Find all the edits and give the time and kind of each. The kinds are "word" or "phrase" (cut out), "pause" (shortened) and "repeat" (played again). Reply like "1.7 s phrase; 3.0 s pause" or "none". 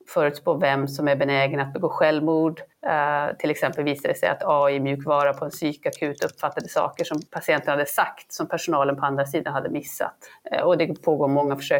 2.7 s pause; 7.3 s pause